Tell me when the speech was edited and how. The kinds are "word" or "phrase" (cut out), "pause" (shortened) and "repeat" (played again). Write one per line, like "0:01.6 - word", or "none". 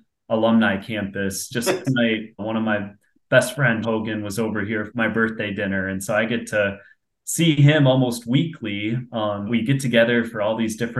0:01.8 - word
0:02.4 - word
0:03.8 - word
0:04.9 - word
0:09.5 - word